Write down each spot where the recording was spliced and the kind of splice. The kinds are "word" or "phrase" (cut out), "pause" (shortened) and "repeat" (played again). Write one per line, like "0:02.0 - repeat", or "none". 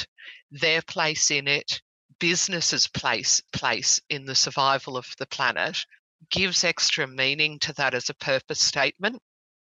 0:03.5 - repeat